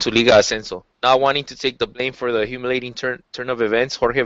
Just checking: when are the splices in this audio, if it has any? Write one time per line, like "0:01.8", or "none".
0:00.9